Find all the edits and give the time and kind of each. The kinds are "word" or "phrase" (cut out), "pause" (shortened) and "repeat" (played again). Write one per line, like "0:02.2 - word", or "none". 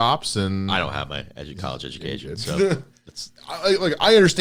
0:03.4 - pause